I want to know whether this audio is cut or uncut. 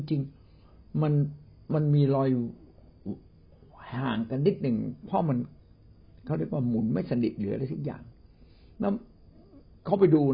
uncut